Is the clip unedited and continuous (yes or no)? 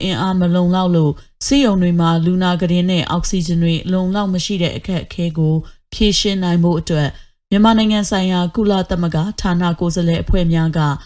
yes